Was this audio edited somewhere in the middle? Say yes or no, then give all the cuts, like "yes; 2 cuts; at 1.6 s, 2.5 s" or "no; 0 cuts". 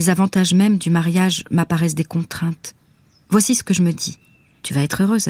no; 0 cuts